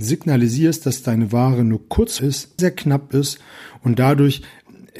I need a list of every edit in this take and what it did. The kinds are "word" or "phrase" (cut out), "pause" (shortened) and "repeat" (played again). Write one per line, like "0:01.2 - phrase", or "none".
0:02.2 - word
0:02.6 - word